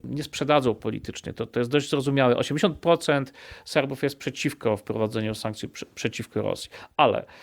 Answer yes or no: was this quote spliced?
no